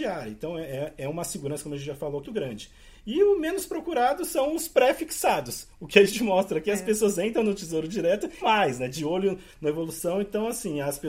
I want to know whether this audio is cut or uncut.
cut